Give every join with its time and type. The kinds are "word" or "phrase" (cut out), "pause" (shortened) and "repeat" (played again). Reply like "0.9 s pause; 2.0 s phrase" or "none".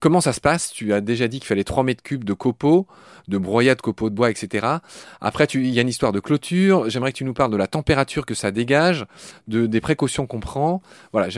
none